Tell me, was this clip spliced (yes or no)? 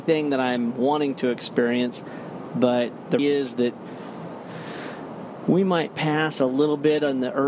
yes